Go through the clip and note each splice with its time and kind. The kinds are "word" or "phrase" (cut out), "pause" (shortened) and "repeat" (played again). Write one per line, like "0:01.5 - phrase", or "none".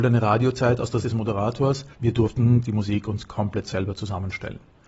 0:01.0 - word
0:01.9 - pause